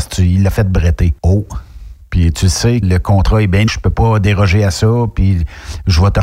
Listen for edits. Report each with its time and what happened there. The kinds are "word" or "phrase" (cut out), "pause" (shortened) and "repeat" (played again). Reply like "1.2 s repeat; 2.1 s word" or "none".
1.2 s pause; 2.8 s word; 3.7 s word